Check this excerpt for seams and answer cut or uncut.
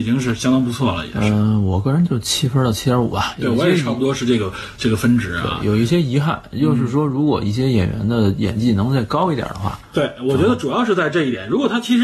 uncut